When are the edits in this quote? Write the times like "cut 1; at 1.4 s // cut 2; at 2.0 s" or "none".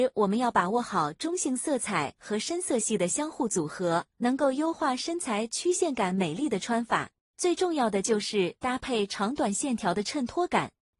cut 1; at 4.1 s